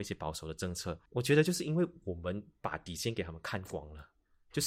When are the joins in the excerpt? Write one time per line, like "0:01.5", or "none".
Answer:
0:01.1